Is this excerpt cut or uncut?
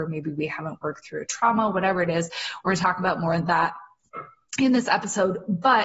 uncut